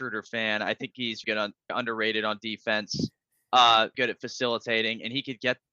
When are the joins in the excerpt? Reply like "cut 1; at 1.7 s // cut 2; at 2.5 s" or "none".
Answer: cut 1; at 1.2 s // cut 2; at 1.7 s // cut 3; at 3.9 s